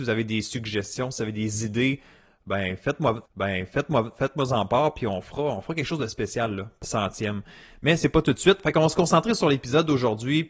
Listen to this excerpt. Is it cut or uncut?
cut